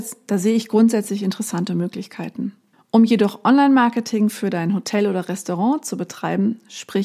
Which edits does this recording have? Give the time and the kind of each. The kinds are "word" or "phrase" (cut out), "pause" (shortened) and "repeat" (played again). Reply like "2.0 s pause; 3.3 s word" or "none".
2.7 s pause